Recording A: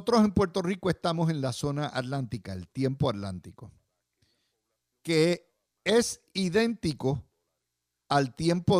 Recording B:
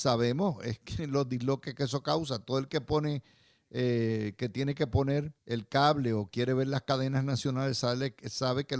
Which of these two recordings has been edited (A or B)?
B